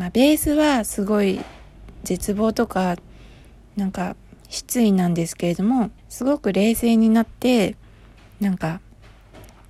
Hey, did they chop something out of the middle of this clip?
yes; 1 cut; at 6.0 s

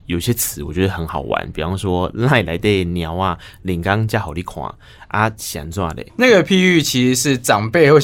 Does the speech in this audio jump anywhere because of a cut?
yes; 1 cut; at 6.1 s

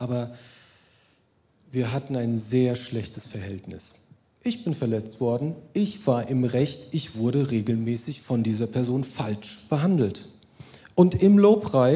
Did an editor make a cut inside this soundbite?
no; 0 cuts

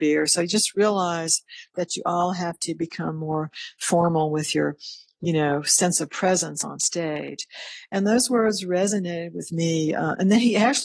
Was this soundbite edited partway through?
no; 0 cuts

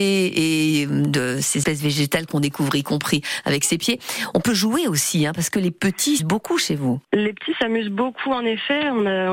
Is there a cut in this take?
yes; 3 cuts; at 1.6 s, 6.2 s, 7.0 s

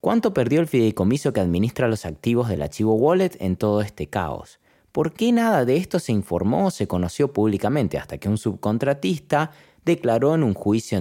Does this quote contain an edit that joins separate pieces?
no; 0 cuts

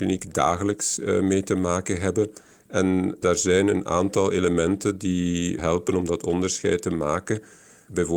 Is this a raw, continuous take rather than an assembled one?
yes; 0 cuts

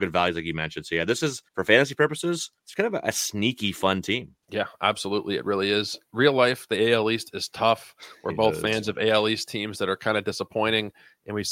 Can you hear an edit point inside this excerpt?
yes; 3 cuts; at 1.5 s, 2.6 s, 4.4 s

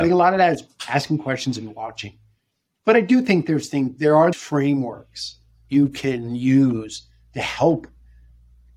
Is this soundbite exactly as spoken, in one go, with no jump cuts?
no; 1 cut; at 4.3 s

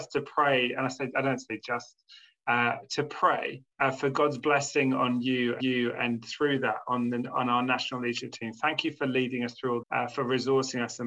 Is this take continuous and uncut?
no; 3 cuts; at 3.7 s, 5.6 s, 9.8 s

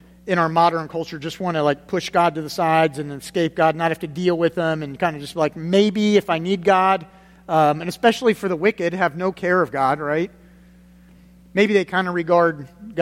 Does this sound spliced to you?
no; 0 cuts

